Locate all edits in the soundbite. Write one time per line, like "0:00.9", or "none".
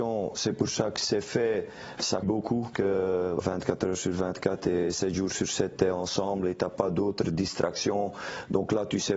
0:02.2
0:02.7
0:03.4